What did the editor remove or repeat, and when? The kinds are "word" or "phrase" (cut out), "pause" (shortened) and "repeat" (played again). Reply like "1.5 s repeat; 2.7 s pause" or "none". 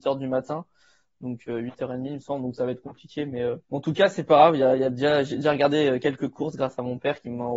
3.6 s pause